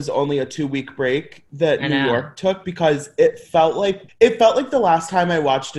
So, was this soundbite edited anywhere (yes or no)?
yes